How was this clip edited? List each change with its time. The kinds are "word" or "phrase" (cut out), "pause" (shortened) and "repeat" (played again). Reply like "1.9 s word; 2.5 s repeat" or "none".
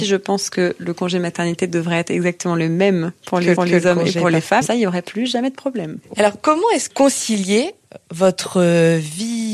3.6 s repeat; 4.6 s phrase; 6.9 s word